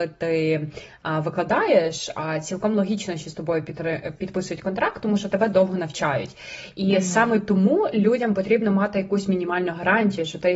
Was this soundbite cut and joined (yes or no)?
no